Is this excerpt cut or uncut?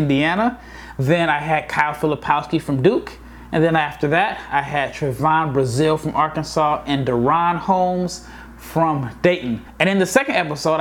uncut